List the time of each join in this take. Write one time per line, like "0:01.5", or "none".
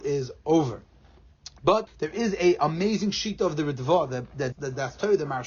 0:01.9
0:04.5